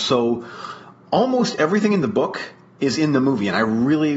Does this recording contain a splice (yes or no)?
no